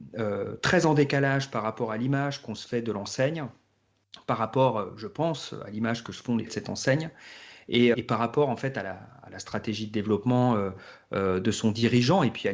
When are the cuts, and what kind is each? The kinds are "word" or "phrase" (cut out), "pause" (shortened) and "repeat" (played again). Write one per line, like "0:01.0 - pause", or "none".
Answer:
0:06.5 - word
0:07.9 - word